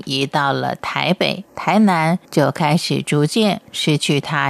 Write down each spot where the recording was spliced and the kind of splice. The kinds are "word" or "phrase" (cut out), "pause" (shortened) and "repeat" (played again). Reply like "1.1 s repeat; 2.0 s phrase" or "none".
1.5 s pause; 2.2 s pause